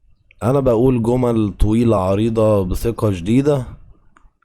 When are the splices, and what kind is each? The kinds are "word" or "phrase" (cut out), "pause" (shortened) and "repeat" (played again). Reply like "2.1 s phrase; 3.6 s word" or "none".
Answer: none